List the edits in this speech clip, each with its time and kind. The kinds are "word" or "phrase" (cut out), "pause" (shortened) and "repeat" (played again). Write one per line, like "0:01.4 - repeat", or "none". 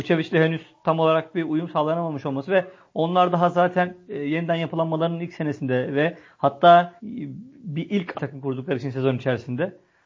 0:07.0 - pause
0:08.1 - phrase